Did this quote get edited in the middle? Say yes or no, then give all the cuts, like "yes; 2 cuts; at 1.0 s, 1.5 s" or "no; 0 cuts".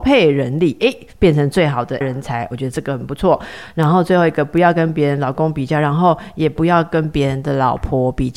yes; 1 cut; at 2.0 s